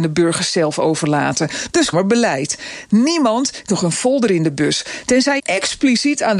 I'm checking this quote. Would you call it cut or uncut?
cut